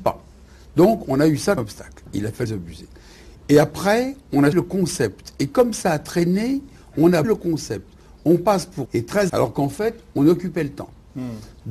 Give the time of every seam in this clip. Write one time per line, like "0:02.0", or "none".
0:01.6
0:02.5
0:04.5
0:07.2
0:08.9
0:09.3